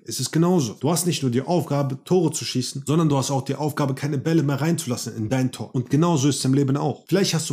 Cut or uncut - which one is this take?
uncut